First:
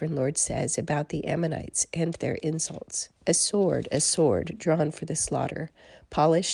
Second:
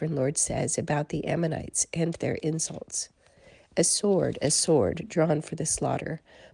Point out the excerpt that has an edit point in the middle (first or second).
first